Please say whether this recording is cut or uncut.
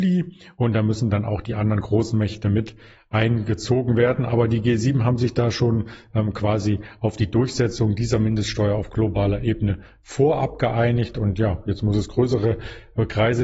uncut